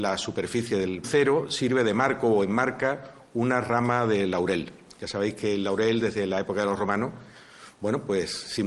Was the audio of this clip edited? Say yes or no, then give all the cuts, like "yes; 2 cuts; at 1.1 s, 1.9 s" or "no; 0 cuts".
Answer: yes; 1 cut; at 1.0 s